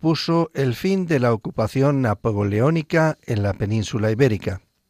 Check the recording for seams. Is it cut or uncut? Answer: uncut